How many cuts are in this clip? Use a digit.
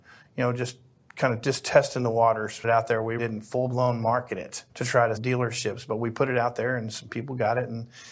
4